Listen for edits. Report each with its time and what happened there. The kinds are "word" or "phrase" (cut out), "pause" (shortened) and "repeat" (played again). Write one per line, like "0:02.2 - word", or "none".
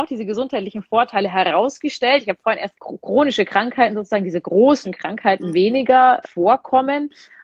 0:02.7 - phrase
0:04.8 - word
0:06.2 - word